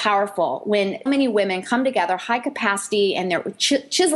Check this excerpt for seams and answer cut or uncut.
cut